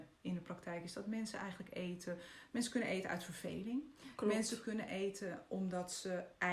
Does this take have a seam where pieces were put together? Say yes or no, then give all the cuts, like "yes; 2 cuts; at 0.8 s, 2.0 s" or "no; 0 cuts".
no; 0 cuts